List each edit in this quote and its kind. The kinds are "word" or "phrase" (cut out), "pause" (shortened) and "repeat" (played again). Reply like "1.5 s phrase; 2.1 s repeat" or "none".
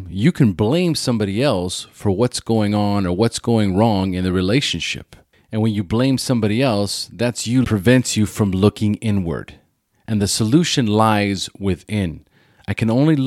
7.6 s phrase